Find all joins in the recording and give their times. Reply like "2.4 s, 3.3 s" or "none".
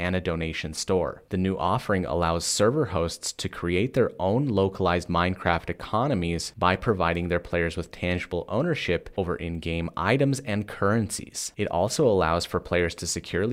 none